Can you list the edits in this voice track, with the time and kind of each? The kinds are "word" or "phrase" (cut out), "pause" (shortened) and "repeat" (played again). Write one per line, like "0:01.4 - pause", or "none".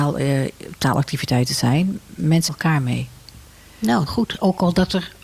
0:02.5 - word
0:04.1 - phrase